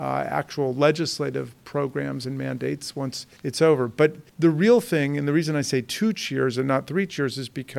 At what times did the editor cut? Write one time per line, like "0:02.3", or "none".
0:03.4
0:04.3